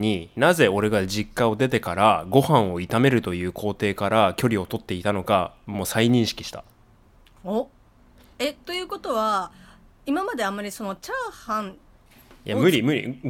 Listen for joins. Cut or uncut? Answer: uncut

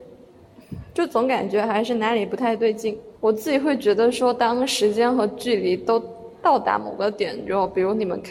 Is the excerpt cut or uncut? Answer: cut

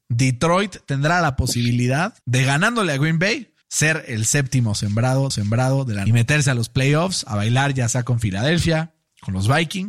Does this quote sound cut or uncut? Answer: cut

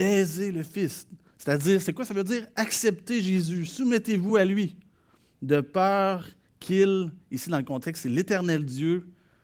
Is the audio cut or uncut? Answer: uncut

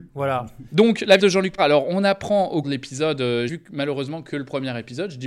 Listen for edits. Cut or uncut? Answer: cut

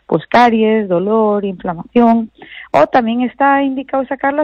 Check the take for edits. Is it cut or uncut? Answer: uncut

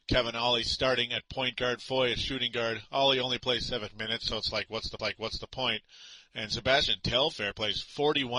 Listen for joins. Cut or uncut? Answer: cut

